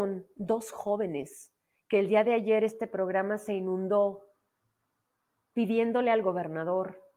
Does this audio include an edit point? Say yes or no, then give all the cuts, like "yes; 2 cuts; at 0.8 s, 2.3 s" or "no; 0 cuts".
no; 0 cuts